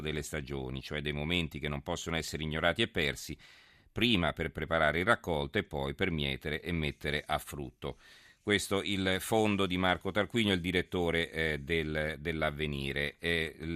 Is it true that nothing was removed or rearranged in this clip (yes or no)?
yes